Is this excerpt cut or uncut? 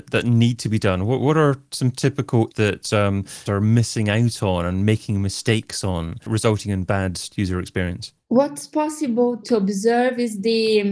cut